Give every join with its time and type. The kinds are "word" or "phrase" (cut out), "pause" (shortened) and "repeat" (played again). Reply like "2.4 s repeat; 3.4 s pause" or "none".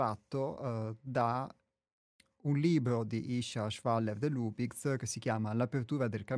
none